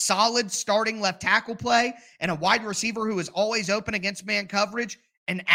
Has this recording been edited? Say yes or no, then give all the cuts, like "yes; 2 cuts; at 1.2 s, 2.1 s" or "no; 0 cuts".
no; 0 cuts